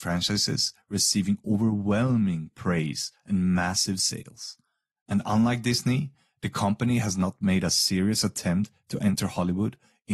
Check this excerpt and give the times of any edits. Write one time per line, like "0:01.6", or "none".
none